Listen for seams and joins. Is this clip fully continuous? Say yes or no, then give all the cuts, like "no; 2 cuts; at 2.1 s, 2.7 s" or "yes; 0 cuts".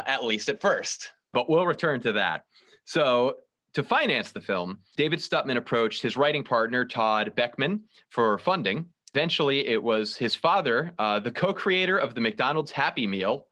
yes; 0 cuts